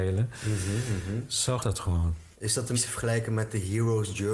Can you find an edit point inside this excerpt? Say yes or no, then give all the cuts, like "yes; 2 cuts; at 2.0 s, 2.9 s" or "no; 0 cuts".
yes; 3 cuts; at 1.6 s, 2.3 s, 2.7 s